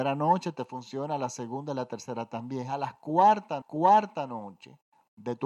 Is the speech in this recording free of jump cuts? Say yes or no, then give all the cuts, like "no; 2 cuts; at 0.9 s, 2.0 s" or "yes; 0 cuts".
no; 1 cut; at 3.6 s